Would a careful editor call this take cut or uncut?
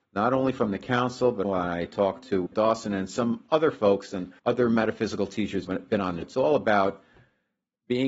cut